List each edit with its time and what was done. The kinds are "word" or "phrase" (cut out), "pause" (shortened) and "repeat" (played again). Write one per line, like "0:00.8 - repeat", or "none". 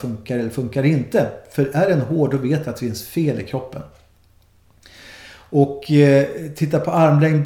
none